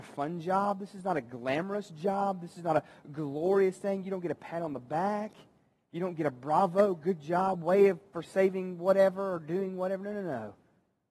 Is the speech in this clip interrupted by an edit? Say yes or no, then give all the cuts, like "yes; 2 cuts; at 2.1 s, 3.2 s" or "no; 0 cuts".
no; 0 cuts